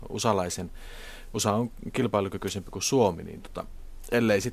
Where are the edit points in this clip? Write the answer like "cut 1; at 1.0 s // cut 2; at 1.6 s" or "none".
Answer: none

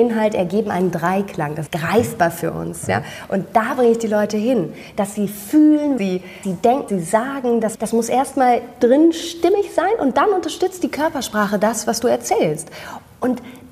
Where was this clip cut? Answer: cut 1; at 1.7 s // cut 2; at 6.0 s // cut 3; at 6.4 s // cut 4; at 6.9 s // cut 5; at 7.7 s // cut 6; at 8.8 s

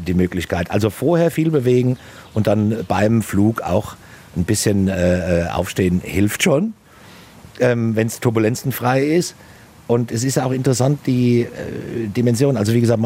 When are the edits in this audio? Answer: none

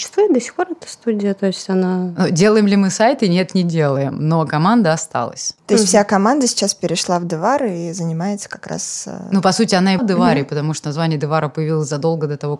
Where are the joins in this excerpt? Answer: cut 1; at 10.0 s

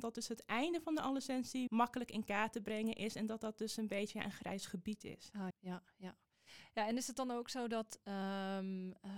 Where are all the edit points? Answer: cut 1; at 1.7 s // cut 2; at 5.5 s

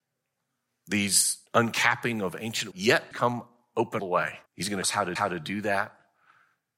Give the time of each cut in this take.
cut 1; at 1.5 s // cut 2; at 2.7 s // cut 3; at 3.1 s // cut 4; at 4.0 s // cut 5; at 4.5 s // cut 6; at 4.8 s // cut 7; at 5.2 s

